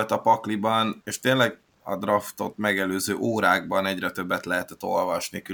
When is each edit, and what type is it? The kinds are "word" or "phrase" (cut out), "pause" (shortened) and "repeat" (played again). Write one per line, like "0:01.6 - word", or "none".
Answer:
0:01.0 - word